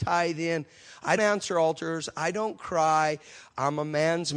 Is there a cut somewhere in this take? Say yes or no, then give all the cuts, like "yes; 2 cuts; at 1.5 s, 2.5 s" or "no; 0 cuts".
yes; 1 cut; at 1.2 s